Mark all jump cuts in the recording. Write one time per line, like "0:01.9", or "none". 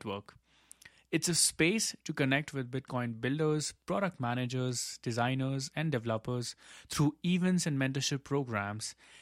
none